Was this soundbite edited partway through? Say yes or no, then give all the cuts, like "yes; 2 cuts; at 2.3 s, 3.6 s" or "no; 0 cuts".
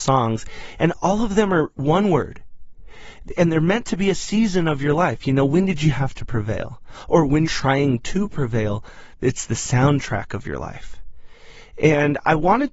yes; 1 cut; at 7.4 s